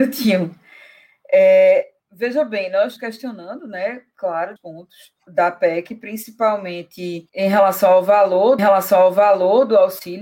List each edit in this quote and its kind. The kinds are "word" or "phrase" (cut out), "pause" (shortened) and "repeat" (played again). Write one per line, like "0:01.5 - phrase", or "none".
0:02.0 - pause
0:03.0 - word
0:04.6 - word
0:05.3 - word
0:07.3 - pause
0:08.6 - repeat